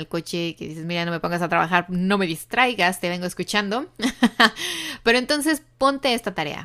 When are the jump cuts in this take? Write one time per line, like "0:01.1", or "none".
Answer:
none

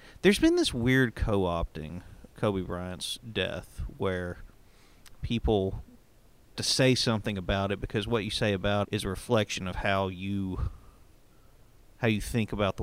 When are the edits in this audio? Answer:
0:02.3
0:06.5
0:08.8

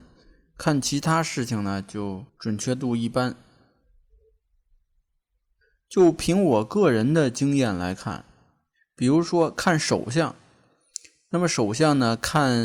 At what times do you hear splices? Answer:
0:02.3

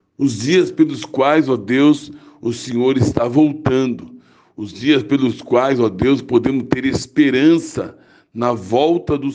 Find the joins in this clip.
none

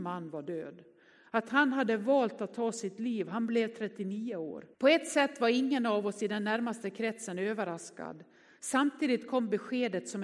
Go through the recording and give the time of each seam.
0:04.7

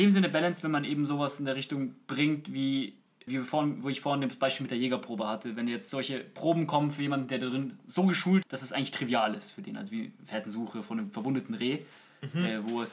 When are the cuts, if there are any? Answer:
0:03.3
0:05.9
0:08.4

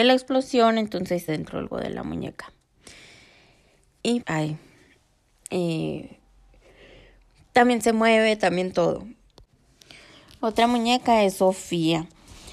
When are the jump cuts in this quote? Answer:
0:01.3
0:01.7
0:04.2

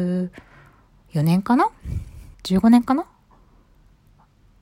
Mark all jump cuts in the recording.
0:02.3

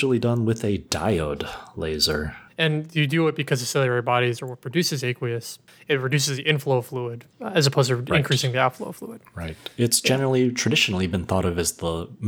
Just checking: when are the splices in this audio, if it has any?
0:02.5
0:07.3

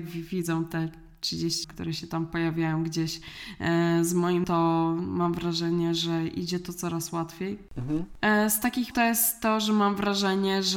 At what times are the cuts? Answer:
0:01.6
0:04.4
0:08.9

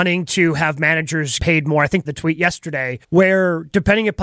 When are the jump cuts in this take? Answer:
0:01.4
0:02.0
0:03.0

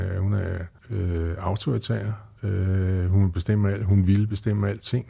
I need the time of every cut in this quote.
0:02.4

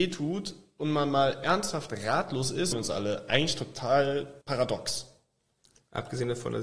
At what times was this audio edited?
0:02.7
0:04.4

